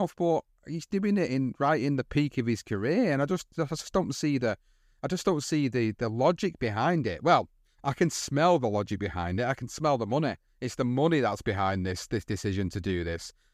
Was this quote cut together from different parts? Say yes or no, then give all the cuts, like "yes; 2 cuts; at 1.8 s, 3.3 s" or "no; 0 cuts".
no; 0 cuts